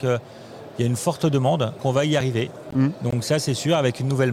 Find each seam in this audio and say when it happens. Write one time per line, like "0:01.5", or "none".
0:01.8